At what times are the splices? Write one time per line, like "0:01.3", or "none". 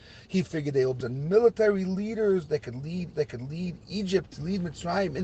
0:01.0
0:03.1